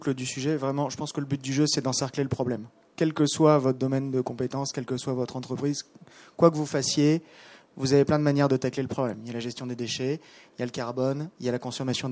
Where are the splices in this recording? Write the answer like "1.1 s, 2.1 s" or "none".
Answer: none